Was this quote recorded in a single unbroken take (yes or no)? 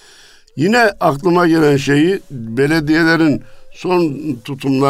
yes